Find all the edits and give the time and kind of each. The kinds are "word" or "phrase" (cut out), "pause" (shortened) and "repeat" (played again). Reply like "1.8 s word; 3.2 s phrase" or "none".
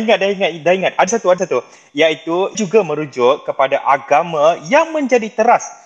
1.1 s word; 1.4 s word; 2.5 s word